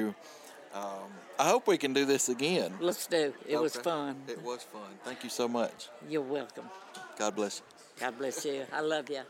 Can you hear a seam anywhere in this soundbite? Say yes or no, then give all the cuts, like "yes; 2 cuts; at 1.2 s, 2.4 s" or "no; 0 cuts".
no; 0 cuts